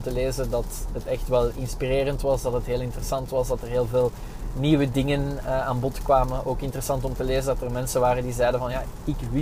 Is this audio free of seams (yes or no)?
yes